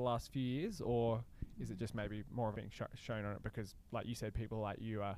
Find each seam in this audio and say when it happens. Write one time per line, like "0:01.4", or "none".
0:02.5

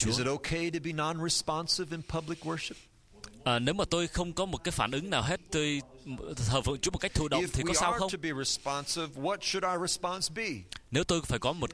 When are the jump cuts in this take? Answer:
none

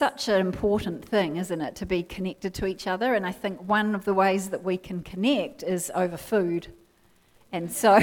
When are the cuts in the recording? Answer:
none

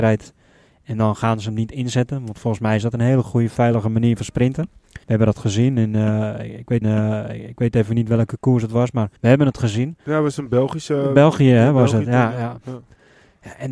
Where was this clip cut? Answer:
0:05.0
0:06.8
0:09.2

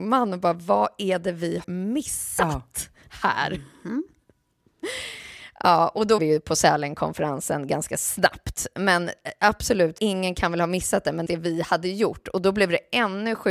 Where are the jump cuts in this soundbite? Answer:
0:01.6
0:06.2
0:10.0
0:11.3

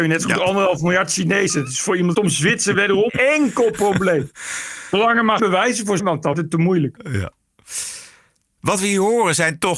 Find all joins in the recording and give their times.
0:02.1
0:03.1
0:05.4
0:06.0
0:06.3

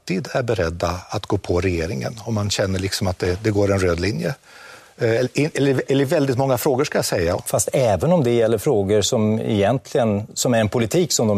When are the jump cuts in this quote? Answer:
none

